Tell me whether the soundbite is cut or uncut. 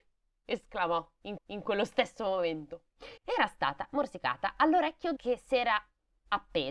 cut